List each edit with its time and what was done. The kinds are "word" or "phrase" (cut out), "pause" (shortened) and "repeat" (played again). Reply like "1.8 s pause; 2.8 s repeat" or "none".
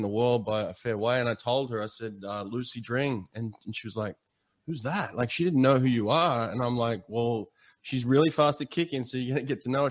none